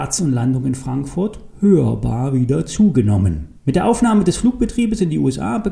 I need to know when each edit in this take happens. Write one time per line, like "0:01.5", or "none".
0:03.6